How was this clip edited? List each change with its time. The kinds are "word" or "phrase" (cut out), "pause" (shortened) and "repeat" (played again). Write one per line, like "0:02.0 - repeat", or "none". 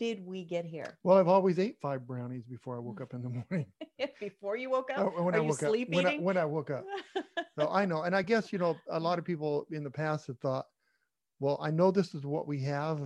none